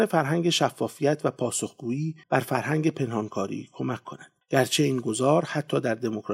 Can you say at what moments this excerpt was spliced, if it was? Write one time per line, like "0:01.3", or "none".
0:02.2
0:04.4

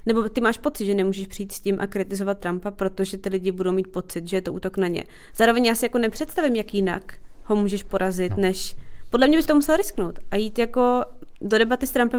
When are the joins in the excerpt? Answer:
0:09.5

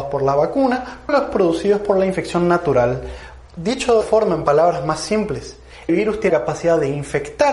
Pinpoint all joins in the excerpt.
0:01.1
0:04.0
0:05.9
0:06.3

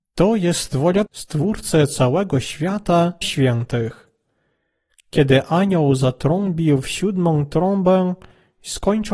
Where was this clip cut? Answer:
0:01.1
0:03.2

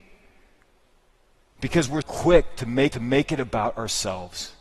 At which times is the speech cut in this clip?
0:02.0
0:02.9

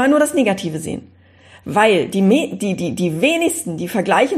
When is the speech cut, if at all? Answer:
none

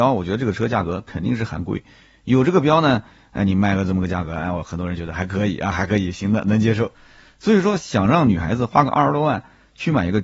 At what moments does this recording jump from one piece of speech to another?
none

